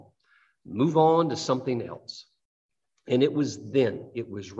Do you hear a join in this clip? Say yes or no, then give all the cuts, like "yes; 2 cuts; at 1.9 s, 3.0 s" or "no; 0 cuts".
no; 0 cuts